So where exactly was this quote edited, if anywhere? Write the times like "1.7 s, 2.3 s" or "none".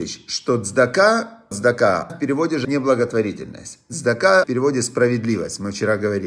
1.5 s, 2.1 s, 2.6 s, 4.4 s